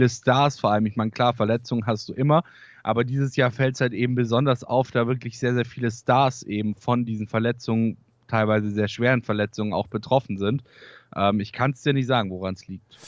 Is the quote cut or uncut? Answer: uncut